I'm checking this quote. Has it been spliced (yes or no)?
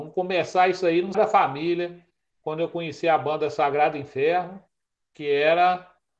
yes